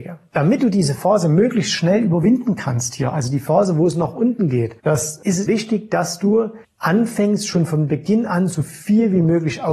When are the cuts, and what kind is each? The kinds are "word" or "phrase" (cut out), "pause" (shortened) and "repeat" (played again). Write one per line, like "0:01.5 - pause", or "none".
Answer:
0:04.8 - pause
0:05.5 - word
0:06.6 - pause